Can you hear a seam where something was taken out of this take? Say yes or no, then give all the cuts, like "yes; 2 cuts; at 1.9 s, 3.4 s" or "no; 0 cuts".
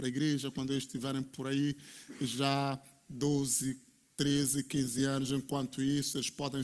no; 0 cuts